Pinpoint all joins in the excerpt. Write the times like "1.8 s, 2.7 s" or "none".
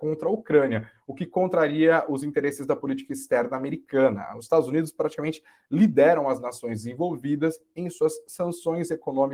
none